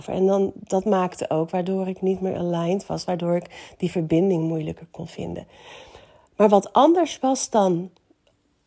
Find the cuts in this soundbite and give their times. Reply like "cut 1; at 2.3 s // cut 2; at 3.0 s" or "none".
none